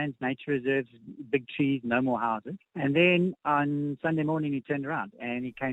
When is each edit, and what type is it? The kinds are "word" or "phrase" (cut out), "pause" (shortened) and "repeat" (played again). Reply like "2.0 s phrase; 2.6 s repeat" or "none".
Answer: 2.6 s pause